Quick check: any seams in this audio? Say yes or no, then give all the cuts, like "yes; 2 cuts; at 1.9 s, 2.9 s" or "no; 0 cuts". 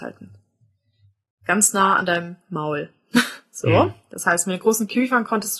no; 0 cuts